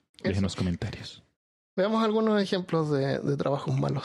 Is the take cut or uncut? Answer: uncut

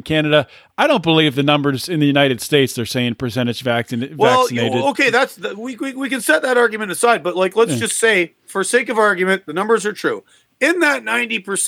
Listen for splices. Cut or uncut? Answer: uncut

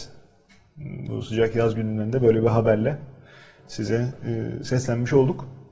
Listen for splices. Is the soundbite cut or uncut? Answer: uncut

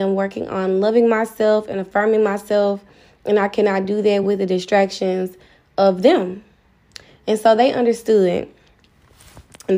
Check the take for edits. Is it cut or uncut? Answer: uncut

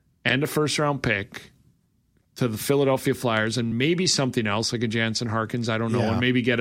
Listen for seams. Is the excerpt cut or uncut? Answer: uncut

